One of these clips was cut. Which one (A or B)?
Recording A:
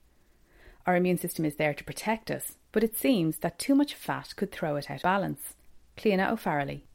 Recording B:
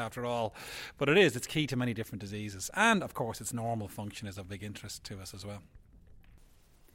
A